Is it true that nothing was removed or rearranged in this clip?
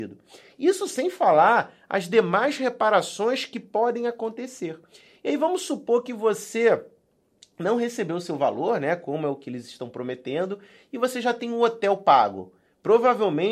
yes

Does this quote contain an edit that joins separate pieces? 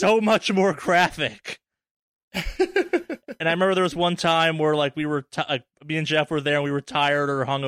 no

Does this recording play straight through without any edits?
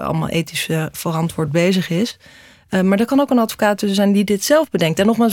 yes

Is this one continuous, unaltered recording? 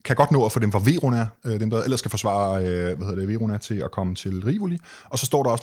yes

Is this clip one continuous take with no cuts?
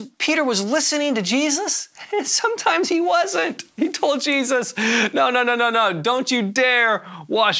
yes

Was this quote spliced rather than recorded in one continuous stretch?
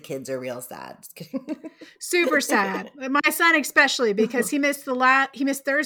no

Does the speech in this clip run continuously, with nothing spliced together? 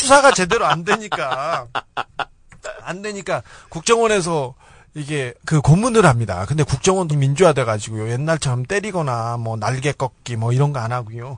no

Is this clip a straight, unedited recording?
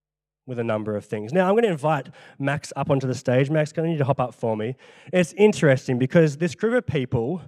yes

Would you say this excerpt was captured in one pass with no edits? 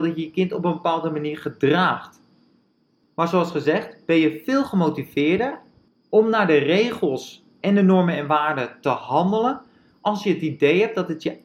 yes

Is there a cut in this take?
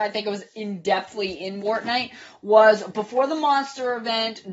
yes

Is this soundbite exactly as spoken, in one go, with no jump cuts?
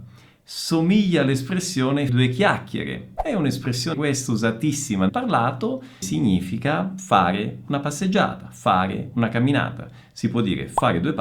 no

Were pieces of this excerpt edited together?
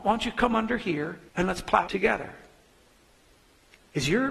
yes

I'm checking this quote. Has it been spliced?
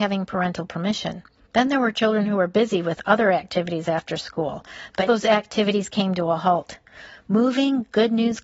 yes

